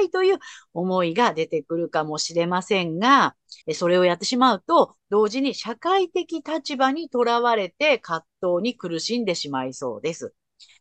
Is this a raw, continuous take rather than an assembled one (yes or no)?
no